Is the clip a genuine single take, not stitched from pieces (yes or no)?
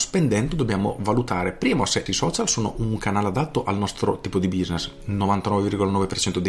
yes